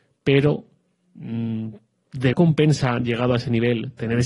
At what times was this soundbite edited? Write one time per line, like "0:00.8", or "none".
0:02.3